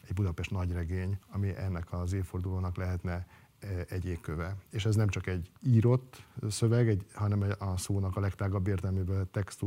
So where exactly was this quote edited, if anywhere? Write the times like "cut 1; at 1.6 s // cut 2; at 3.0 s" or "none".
cut 1; at 1.2 s // cut 2; at 5.6 s